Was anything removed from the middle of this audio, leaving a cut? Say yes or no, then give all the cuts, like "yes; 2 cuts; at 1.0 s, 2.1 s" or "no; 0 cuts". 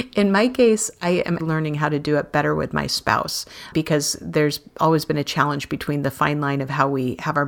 yes; 2 cuts; at 1.4 s, 3.7 s